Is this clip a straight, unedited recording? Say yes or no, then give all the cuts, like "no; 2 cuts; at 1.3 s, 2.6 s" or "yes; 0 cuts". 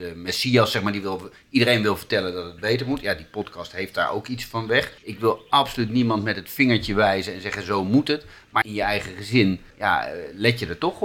no; 3 cuts; at 5.0 s, 8.6 s, 9.7 s